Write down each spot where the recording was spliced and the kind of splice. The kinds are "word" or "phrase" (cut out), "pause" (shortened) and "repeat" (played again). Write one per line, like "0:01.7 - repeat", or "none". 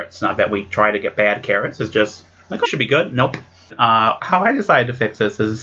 0:02.6 - word
0:04.2 - word